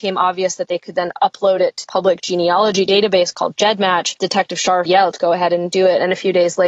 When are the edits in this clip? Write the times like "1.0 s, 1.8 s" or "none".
1.8 s, 4.8 s